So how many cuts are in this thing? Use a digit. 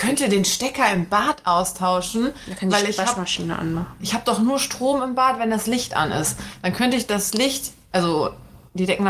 0